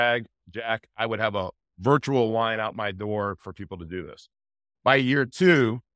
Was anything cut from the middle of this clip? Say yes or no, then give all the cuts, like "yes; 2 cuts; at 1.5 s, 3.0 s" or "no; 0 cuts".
no; 0 cuts